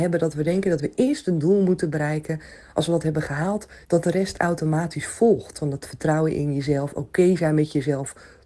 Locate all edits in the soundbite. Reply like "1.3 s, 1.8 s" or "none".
3.8 s